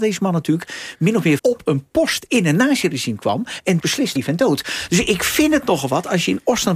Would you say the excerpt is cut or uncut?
cut